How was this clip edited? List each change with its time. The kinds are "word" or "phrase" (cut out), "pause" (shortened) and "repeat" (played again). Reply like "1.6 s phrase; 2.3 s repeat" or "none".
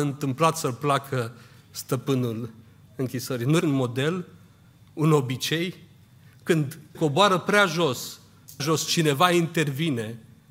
3.6 s word; 6.9 s word; 8.6 s word